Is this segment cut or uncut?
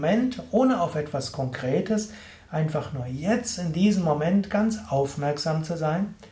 uncut